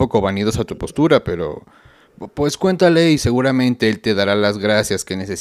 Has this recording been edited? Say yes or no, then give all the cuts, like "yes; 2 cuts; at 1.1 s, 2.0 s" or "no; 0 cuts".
no; 0 cuts